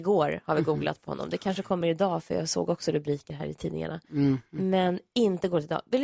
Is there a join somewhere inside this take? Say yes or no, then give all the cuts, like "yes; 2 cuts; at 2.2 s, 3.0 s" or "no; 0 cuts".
no; 0 cuts